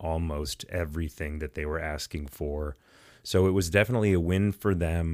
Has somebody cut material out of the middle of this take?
no; 0 cuts

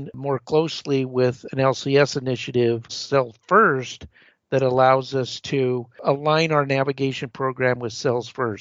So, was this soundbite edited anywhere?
yes; 1 cut; at 2.9 s

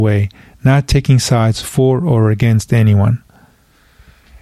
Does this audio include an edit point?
no; 0 cuts

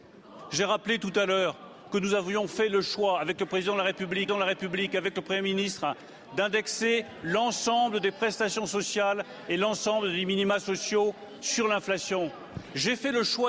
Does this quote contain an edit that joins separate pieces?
yes; 1 cut; at 4.3 s

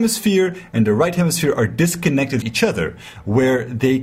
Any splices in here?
yes; 1 cut; at 2.4 s

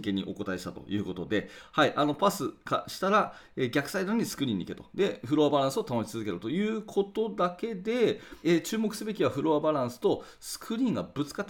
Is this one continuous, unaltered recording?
no; 1 cut; at 8.4 s

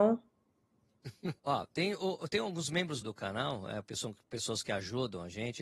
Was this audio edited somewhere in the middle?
yes; 2 cuts; at 1.4 s, 3.0 s

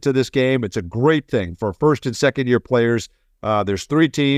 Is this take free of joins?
yes; 0 cuts

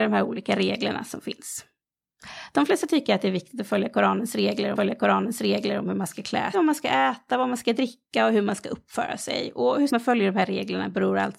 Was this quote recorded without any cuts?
no; 3 cuts; at 4.8 s, 6.5 s, 9.9 s

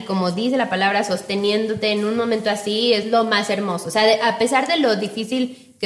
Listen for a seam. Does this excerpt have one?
no; 0 cuts

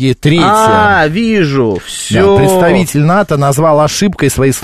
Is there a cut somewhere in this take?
no; 0 cuts

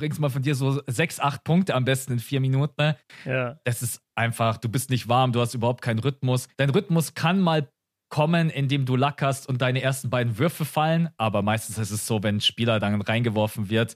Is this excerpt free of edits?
no; 1 cut; at 6.5 s

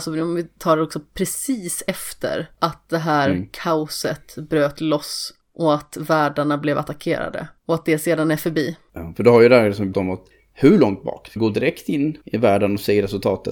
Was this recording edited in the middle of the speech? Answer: yes; 4 cuts; at 7.6 s, 9.9 s, 11.4 s, 12.2 s

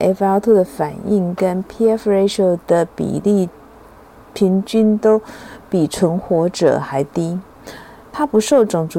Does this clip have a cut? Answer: no; 0 cuts

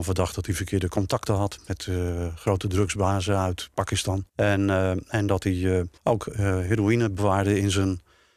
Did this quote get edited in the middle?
yes; 2 cuts; at 4.3 s, 6.0 s

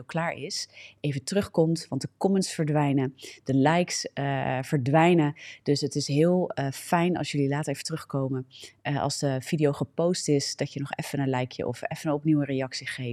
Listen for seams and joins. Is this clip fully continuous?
yes; 0 cuts

